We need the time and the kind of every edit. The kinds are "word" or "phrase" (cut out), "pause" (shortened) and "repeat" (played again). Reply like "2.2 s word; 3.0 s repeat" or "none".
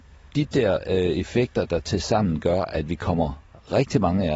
none